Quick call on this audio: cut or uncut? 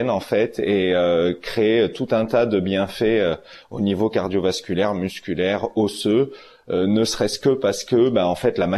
uncut